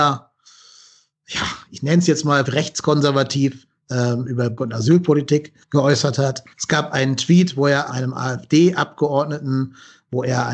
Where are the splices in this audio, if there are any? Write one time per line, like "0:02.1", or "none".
0:02.5
0:04.6
0:05.6
0:06.5
0:07.9

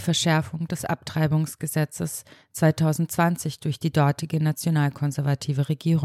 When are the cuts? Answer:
none

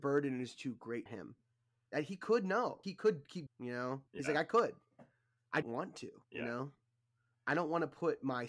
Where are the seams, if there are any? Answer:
0:01.1
0:01.9
0:02.8
0:03.5
0:04.1
0:05.6
0:06.2

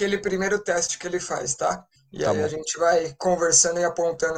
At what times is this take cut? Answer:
none

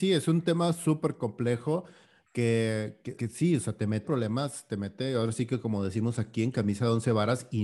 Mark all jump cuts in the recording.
0:03.2
0:04.0

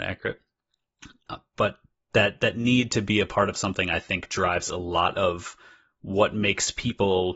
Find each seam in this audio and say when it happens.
none

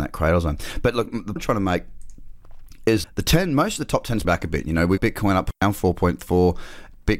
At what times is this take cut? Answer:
0:01.4
0:03.0
0:04.2
0:05.0
0:05.6

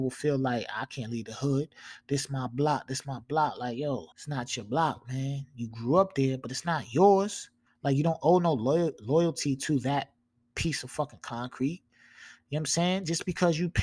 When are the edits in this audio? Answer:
0:04.1
0:07.7

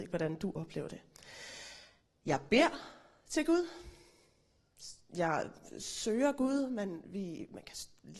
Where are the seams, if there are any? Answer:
none

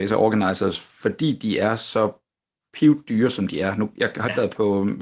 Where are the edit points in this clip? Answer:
none

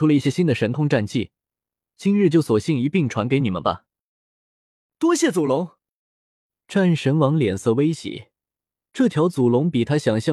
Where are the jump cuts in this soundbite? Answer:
none

